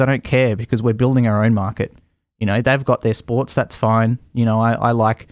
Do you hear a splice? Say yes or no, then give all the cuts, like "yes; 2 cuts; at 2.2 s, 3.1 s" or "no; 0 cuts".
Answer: no; 0 cuts